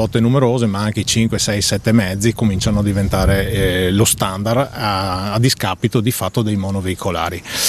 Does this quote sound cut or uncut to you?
uncut